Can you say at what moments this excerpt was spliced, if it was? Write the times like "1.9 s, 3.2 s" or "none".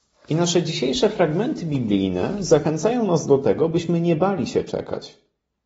none